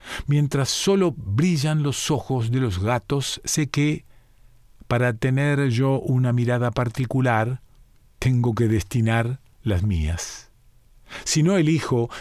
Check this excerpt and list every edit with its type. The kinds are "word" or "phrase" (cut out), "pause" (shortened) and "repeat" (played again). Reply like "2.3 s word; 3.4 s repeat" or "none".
none